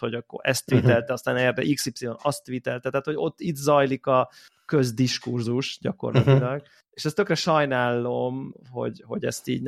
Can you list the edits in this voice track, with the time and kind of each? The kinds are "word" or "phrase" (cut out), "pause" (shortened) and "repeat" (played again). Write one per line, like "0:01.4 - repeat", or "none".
none